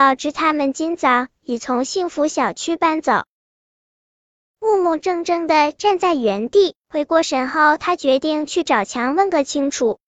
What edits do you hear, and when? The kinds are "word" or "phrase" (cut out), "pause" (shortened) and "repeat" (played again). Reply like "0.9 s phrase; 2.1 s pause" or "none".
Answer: none

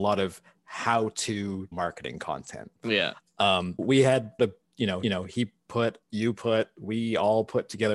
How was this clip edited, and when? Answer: 1.7 s word; 2.8 s pause; 3.8 s word; 4.4 s phrase; 5.0 s repeat; 6.0 s pause

